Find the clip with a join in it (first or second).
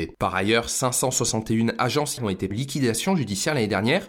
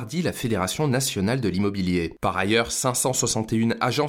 first